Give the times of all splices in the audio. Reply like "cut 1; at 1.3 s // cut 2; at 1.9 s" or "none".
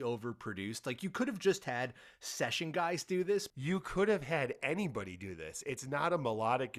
none